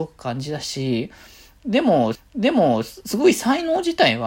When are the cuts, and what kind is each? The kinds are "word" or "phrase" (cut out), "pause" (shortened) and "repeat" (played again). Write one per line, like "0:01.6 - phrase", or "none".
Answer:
0:02.1 - repeat